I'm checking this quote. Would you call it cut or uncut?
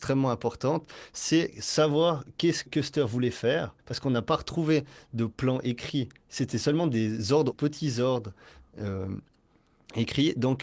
cut